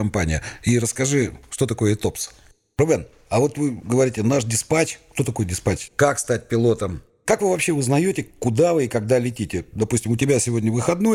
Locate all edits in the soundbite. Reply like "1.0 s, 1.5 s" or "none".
none